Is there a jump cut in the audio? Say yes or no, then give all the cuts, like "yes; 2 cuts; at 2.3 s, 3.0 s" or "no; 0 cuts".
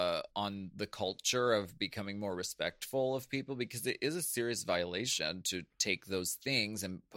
no; 0 cuts